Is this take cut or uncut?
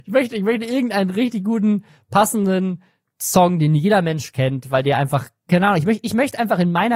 uncut